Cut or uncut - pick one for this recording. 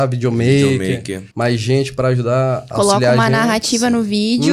cut